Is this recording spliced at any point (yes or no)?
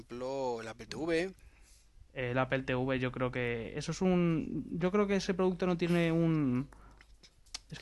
no